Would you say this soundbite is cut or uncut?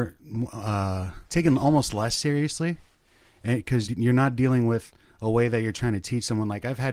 cut